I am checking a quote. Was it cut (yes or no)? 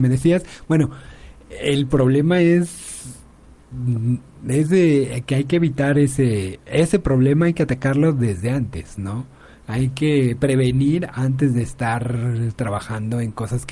no